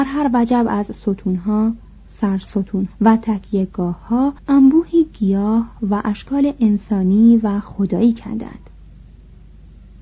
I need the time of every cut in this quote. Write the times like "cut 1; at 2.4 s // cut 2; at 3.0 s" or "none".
cut 1; at 2.9 s // cut 2; at 4.4 s